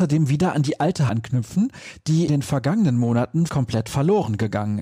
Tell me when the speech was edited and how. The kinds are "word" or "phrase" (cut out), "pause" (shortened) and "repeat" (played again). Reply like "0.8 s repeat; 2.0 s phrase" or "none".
1.1 s word; 2.3 s word; 3.5 s word